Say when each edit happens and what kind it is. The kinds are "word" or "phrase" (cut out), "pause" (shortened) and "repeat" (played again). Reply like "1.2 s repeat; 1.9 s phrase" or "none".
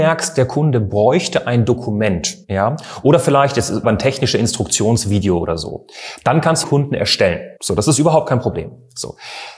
2.4 s pause; 3.8 s phrase; 6.6 s phrase; 7.6 s pause